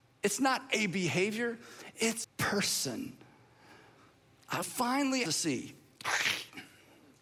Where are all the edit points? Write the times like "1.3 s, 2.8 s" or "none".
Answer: 2.2 s, 4.6 s, 5.2 s

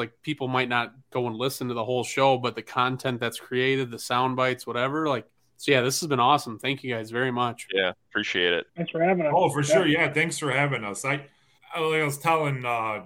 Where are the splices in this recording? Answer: 1.0 s, 5.4 s, 8.7 s, 11.6 s

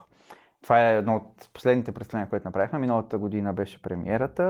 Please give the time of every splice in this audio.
none

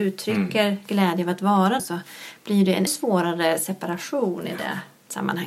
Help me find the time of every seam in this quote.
1.8 s, 2.9 s

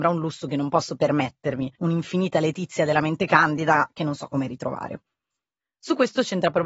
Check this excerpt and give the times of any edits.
1.8 s

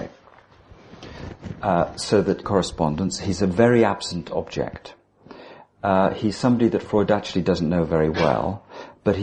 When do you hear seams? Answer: 2.4 s

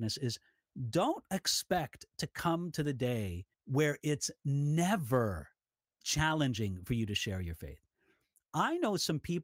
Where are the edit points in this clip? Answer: 3.5 s, 6.0 s

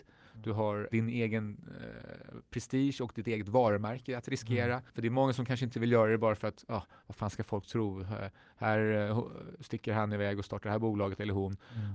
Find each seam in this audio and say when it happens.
4.9 s

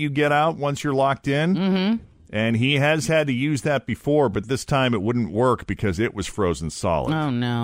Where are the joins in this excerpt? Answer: none

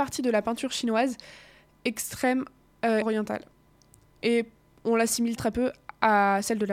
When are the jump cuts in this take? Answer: 1.8 s, 3.0 s, 5.4 s

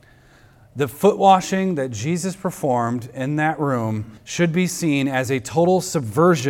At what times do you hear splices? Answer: 4.2 s

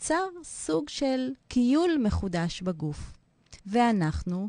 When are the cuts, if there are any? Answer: 1.4 s, 3.6 s

